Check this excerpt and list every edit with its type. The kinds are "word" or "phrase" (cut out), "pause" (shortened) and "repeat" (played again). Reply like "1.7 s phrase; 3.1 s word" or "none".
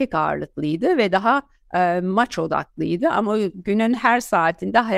none